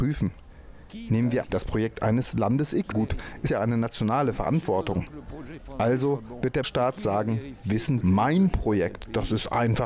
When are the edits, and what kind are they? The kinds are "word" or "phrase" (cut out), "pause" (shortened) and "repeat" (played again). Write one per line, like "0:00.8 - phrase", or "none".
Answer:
0:01.4 - word
0:02.9 - word
0:03.5 - word
0:06.6 - word
0:08.0 - word

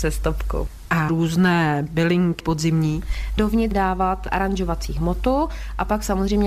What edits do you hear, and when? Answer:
0:01.1 - phrase
0:02.4 - phrase
0:03.7 - word

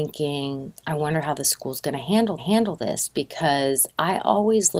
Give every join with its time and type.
0:02.4 - repeat

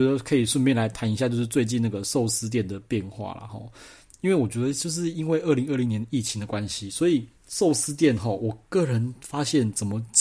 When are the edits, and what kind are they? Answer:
0:07.4 - pause

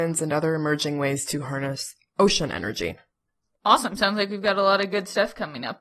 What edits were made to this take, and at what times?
none

